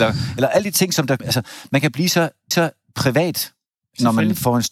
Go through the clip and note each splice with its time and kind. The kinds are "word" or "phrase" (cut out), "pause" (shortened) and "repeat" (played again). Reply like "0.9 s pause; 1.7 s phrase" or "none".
1.2 s word; 2.5 s repeat